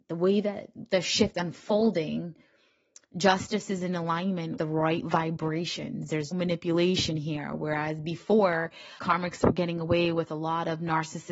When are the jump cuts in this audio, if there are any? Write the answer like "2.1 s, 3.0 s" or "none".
1.3 s, 4.6 s, 6.3 s, 9.0 s

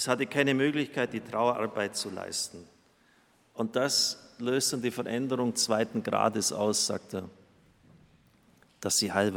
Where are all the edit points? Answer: none

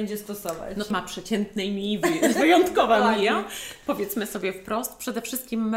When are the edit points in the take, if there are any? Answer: 0.9 s, 2.3 s

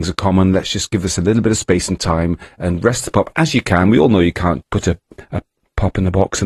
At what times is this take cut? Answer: 4.6 s

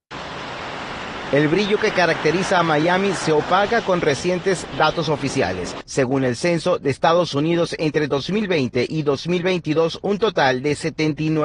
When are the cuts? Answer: none

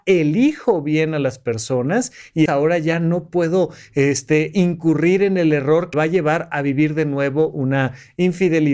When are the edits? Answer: 2.5 s, 5.9 s

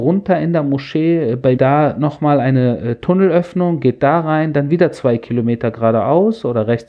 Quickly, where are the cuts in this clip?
1.6 s

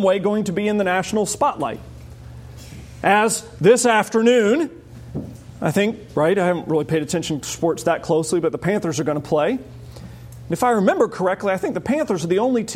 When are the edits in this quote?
none

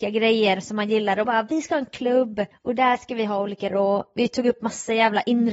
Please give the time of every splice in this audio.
1.2 s, 2.5 s, 3.7 s

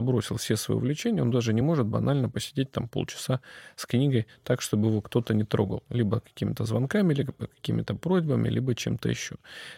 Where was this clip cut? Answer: none

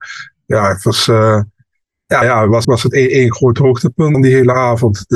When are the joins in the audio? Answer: 2.2 s, 2.6 s, 4.1 s

